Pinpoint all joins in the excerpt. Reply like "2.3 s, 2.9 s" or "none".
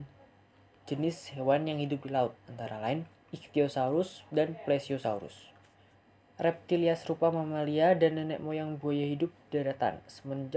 2.4 s, 3.2 s, 5.9 s